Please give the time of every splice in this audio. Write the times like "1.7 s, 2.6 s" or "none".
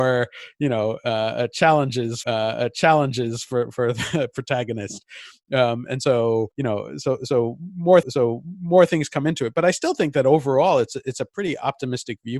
2.2 s, 6.5 s, 8.0 s